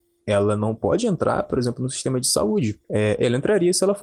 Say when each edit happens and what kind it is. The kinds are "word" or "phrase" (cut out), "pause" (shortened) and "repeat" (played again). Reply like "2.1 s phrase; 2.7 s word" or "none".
2.8 s pause